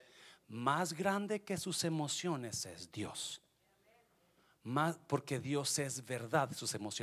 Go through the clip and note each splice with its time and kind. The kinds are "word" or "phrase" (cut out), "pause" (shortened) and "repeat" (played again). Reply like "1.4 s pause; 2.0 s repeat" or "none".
none